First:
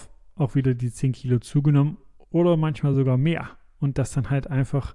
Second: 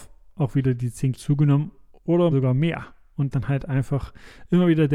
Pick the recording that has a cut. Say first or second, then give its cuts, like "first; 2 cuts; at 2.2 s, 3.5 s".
second; 3 cuts; at 1.1 s, 2.3 s, 3.3 s